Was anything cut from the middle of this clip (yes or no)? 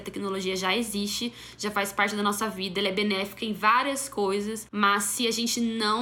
no